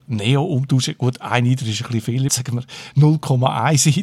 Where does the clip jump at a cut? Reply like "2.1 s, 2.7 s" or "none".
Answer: 2.3 s

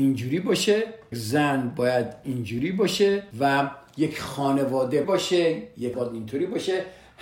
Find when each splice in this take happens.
1.1 s, 3.3 s, 5.0 s, 5.9 s

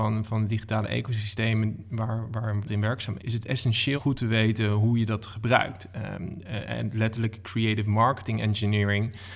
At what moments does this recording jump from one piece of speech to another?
2.7 s, 3.2 s, 4.0 s

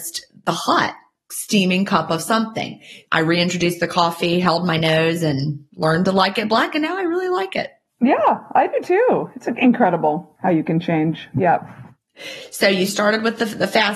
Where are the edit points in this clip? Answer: none

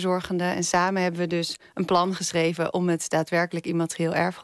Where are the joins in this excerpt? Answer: none

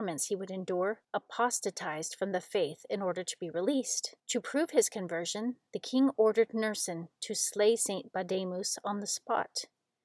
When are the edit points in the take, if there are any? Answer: 1.0 s, 4.2 s

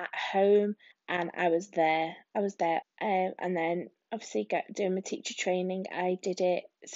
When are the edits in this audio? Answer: 0.9 s, 2.8 s

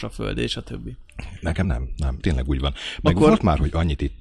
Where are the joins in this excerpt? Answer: 1.6 s, 2.2 s

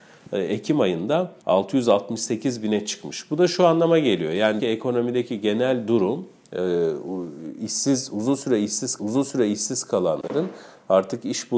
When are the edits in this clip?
1.4 s, 4.6 s, 9.0 s

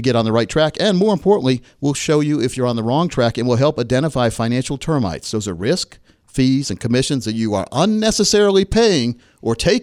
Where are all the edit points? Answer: none

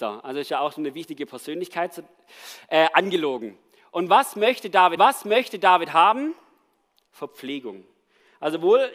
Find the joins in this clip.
5.0 s

